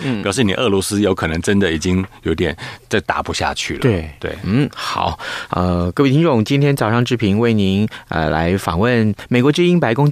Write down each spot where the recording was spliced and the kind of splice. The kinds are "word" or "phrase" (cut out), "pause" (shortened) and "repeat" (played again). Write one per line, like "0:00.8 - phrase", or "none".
none